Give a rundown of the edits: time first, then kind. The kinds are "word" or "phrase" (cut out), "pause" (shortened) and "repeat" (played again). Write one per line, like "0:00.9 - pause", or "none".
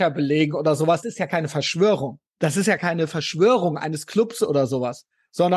0:01.0 - word
0:02.3 - pause
0:02.8 - phrase